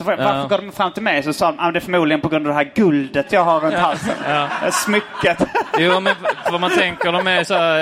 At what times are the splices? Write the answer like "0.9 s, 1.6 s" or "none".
none